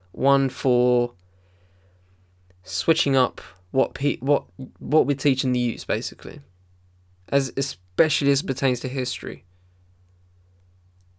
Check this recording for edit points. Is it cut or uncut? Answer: uncut